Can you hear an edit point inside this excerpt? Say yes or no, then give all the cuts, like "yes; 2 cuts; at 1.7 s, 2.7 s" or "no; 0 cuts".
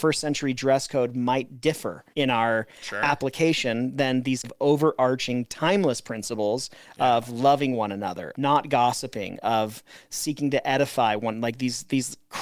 yes; 3 cuts; at 2.1 s, 4.4 s, 8.3 s